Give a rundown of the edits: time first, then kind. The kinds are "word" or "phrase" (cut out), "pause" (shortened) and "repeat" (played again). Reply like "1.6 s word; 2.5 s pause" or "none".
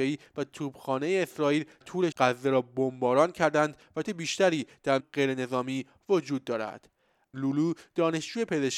1.8 s word; 2.1 s word; 4.0 s word; 5.0 s phrase; 7.3 s word